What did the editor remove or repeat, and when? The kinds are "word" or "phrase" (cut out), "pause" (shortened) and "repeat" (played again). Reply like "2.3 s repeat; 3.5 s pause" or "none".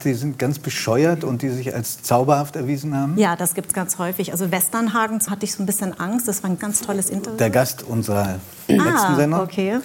5.3 s phrase; 6.6 s word